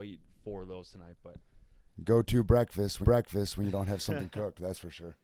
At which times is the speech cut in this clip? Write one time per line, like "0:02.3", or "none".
0:03.0